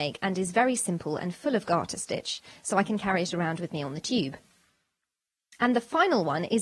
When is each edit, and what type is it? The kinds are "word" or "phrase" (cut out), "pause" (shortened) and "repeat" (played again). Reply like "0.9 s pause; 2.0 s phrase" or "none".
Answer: none